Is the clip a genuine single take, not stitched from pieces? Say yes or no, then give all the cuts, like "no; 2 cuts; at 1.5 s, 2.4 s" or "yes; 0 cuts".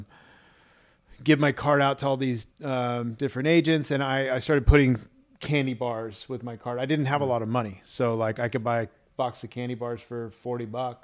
no; 1 cut; at 2.5 s